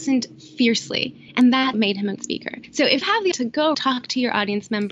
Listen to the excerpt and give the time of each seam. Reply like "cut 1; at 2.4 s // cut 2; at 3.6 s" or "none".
cut 1; at 1.7 s // cut 2; at 2.2 s // cut 3; at 3.0 s // cut 4; at 3.3 s // cut 5; at 3.7 s